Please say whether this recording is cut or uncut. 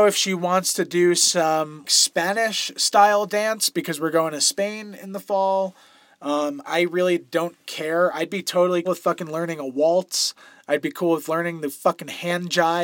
cut